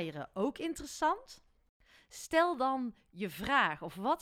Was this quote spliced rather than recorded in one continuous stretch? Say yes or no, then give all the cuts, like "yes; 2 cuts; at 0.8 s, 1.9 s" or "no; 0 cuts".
no; 0 cuts